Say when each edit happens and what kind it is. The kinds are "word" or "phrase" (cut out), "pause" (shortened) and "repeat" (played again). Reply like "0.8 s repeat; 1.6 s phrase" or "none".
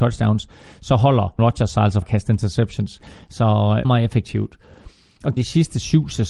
1.4 s word; 2.0 s word; 3.8 s word; 5.4 s word